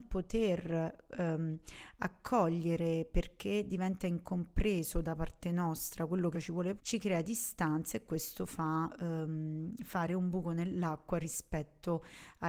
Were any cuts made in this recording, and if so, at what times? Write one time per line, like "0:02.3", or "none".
0:06.3
0:06.8